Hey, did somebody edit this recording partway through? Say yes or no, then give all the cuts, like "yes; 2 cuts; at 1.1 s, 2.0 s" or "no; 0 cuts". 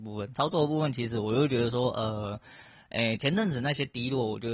no; 0 cuts